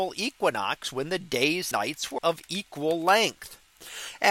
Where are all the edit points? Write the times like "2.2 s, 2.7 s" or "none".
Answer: 1.7 s, 2.2 s